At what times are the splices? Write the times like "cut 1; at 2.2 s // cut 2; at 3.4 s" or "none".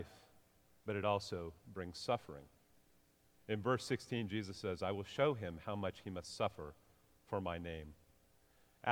none